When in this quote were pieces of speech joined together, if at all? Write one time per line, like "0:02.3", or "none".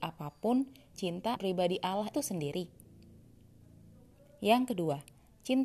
0:00.9
0:01.4
0:02.1